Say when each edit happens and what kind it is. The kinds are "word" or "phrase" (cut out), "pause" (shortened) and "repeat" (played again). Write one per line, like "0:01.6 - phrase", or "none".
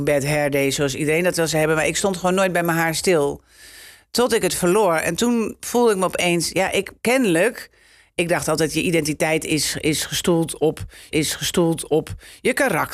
0:07.0 - pause
0:11.1 - repeat